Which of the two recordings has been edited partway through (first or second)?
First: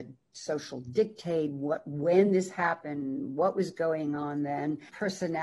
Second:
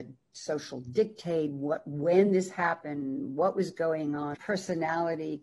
second